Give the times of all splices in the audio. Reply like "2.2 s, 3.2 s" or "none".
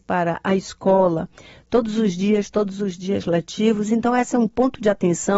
none